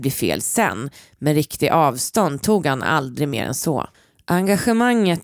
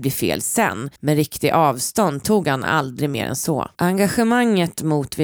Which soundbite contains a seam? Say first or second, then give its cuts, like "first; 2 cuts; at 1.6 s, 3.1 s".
second; 2 cuts; at 1.0 s, 3.7 s